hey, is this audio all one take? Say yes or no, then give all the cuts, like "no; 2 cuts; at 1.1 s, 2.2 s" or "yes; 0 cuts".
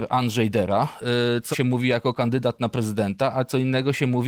no; 1 cut; at 1.5 s